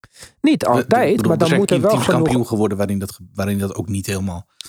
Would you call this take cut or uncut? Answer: uncut